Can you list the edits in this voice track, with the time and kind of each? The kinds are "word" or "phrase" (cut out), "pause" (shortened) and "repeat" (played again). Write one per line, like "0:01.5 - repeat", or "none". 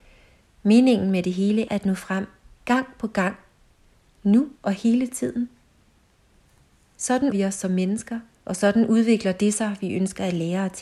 0:01.7 - word
0:04.6 - pause
0:07.3 - word
0:08.3 - pause